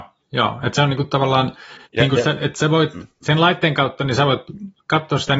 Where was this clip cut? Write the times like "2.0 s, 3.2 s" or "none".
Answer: 1.8 s